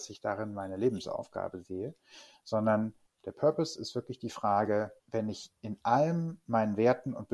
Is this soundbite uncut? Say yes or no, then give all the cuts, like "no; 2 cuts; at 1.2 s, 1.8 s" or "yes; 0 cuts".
no; 2 cuts; at 3.1 s, 5.0 s